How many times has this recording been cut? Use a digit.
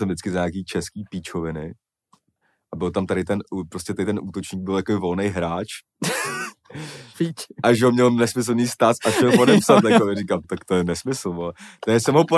1